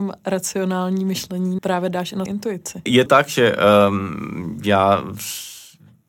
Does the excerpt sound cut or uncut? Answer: cut